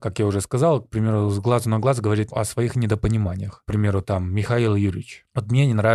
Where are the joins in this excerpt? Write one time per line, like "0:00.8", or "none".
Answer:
0:02.3